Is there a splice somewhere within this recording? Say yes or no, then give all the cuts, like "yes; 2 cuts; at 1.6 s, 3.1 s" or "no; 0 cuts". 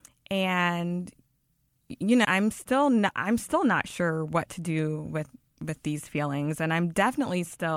yes; 1 cut; at 2.2 s